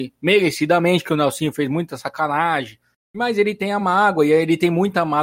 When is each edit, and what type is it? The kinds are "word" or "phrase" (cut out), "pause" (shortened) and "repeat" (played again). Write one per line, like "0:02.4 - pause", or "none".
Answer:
none